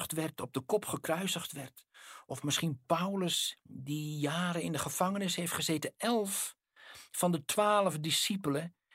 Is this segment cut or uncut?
uncut